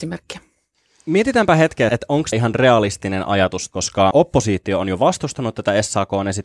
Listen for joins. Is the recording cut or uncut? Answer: cut